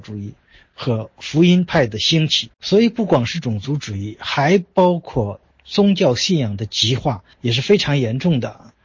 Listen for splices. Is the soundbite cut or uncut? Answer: cut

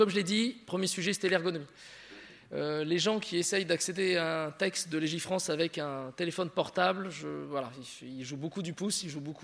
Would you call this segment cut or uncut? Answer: uncut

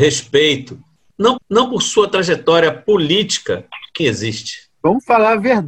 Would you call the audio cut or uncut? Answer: cut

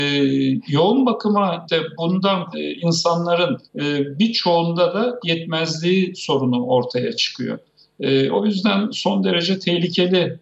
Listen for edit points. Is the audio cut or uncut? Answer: cut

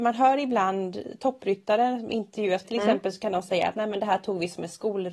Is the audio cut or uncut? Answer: cut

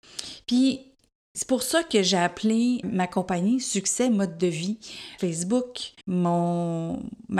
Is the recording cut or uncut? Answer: cut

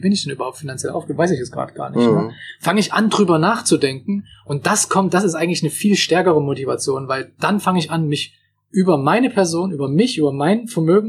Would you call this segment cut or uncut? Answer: uncut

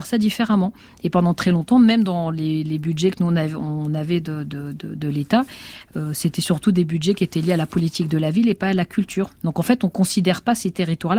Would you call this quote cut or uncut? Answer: uncut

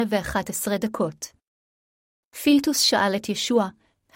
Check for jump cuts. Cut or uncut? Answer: uncut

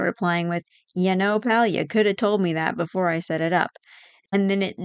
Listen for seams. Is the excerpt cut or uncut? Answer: uncut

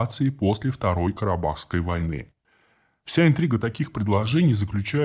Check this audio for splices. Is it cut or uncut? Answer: uncut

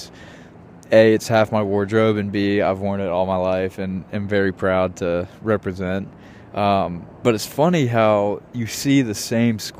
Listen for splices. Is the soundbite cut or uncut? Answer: cut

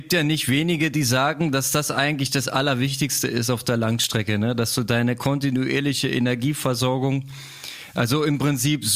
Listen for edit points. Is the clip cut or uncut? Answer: uncut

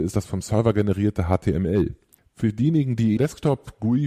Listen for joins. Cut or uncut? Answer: cut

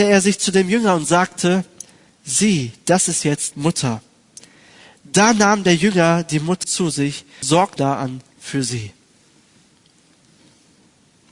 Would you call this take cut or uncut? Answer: cut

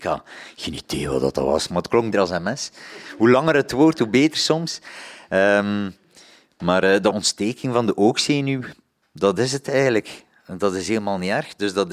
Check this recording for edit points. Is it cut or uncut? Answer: cut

